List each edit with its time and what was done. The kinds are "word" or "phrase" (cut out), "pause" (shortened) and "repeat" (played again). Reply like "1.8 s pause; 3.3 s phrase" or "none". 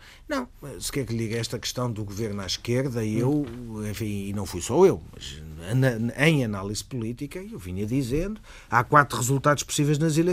none

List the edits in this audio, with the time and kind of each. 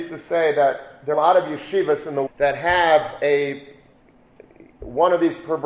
1.1 s word; 2.3 s word

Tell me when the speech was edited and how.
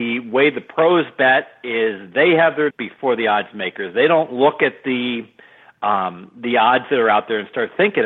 2.7 s phrase

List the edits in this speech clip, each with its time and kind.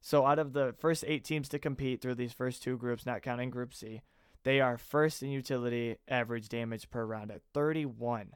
none

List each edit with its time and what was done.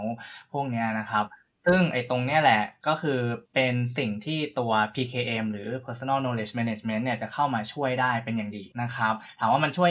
3.5 s pause; 8.7 s pause

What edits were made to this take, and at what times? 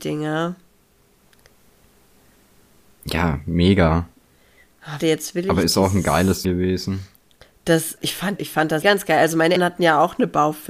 5.0 s word; 6.4 s word; 8.0 s word; 8.4 s word; 8.8 s word; 9.6 s word

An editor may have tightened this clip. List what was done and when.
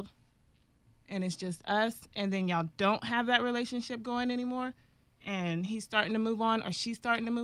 none

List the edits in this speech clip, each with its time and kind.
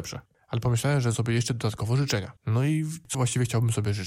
1.1 s word; 2.4 s pause; 3.1 s word

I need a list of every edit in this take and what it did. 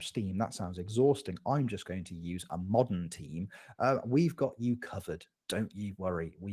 none

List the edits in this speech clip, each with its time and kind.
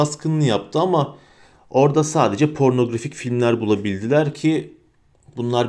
none

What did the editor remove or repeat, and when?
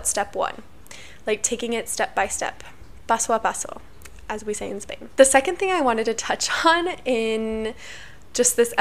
none

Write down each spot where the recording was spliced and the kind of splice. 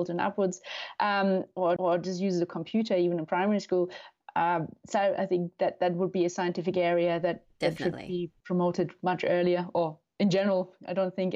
1.8 s repeat

